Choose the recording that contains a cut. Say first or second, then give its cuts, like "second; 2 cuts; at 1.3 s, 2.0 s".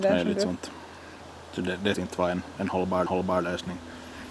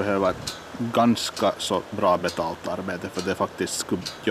first; 2 cuts; at 1.9 s, 3.1 s